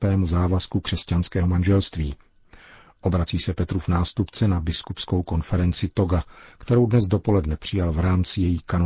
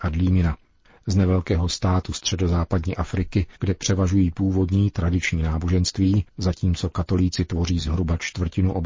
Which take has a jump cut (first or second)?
second